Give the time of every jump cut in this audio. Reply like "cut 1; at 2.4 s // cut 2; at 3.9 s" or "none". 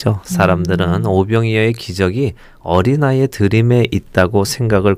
none